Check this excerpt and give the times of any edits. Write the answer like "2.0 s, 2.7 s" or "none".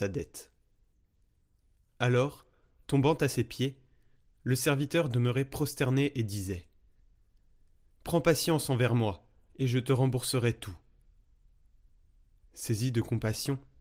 none